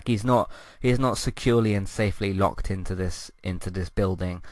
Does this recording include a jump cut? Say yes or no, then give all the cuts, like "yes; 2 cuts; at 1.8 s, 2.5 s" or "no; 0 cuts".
no; 0 cuts